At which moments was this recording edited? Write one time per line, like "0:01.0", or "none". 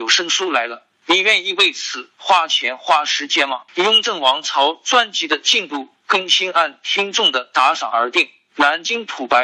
0:03.7